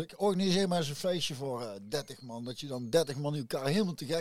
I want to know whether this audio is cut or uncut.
uncut